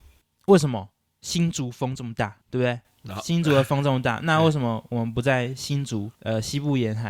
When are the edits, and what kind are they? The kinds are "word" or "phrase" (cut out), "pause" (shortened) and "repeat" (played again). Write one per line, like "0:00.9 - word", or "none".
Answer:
0:01.1 - pause
0:02.4 - pause
0:06.1 - pause